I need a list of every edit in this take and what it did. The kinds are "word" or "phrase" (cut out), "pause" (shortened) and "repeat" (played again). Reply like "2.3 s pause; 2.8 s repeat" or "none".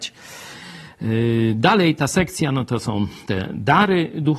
none

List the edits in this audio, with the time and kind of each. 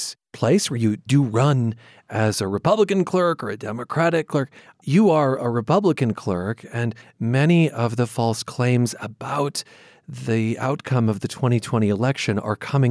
1.1 s word; 4.6 s pause

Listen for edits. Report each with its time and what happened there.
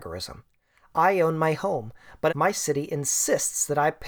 2.3 s word

